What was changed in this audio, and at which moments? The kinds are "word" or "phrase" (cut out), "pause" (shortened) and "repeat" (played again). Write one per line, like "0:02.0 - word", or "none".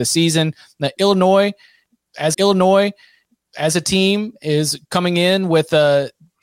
0:02.3 - repeat